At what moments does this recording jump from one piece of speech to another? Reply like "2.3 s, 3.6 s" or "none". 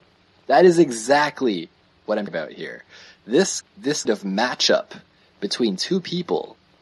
2.3 s, 3.6 s, 4.1 s